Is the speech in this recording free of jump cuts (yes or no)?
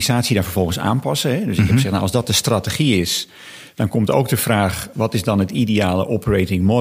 yes